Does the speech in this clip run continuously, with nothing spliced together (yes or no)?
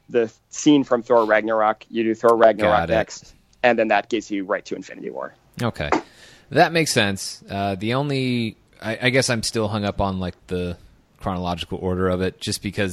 yes